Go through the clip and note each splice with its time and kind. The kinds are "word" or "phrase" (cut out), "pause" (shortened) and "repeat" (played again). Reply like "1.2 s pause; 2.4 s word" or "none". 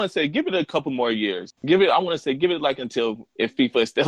1.6 s pause